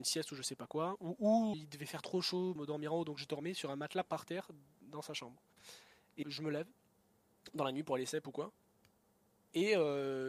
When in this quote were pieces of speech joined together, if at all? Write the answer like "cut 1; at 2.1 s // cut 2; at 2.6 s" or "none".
cut 1; at 1.5 s // cut 2; at 2.6 s // cut 3; at 6.2 s